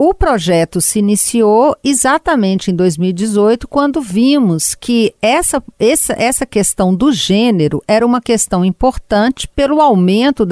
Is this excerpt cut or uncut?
uncut